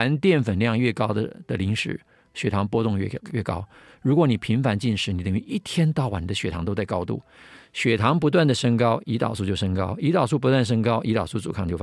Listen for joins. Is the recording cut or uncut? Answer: uncut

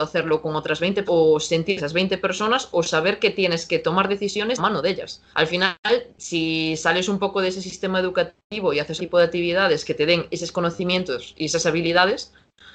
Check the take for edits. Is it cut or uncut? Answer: cut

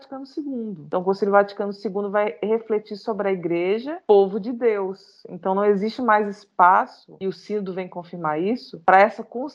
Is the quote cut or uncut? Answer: uncut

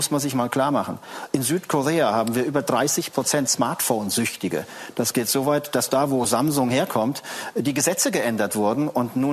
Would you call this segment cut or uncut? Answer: uncut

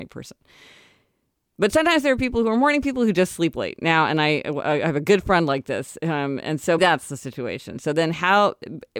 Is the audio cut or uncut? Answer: cut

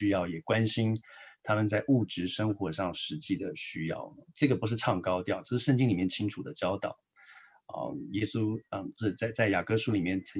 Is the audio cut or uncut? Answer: uncut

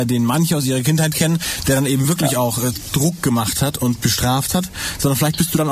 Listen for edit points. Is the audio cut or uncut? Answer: uncut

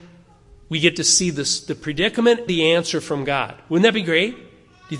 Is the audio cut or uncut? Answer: cut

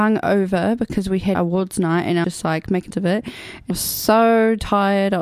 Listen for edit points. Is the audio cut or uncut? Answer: cut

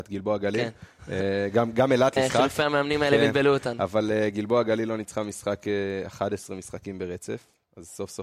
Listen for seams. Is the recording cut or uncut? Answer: cut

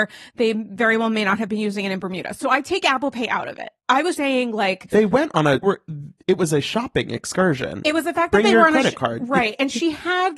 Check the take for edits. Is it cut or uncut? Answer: cut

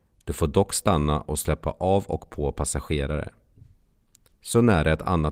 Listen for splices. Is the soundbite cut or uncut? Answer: cut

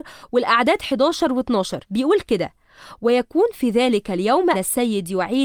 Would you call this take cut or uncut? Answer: cut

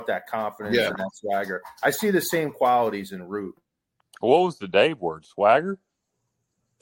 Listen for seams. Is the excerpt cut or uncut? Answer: uncut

